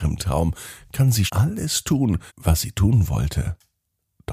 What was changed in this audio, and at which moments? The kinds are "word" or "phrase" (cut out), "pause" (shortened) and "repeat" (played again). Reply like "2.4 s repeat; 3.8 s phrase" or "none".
1.3 s word; 2.3 s pause